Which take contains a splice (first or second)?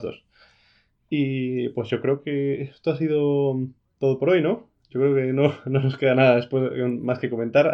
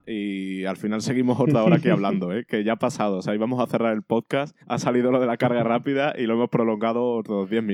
second